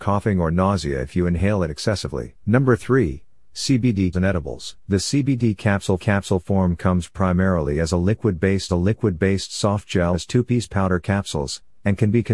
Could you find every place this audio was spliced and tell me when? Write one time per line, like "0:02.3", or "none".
0:02.4
0:04.1
0:04.8
0:06.0
0:08.7
0:10.1